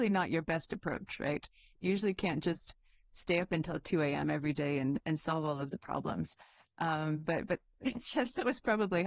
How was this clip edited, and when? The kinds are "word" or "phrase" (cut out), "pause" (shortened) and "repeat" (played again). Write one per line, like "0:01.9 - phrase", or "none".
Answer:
none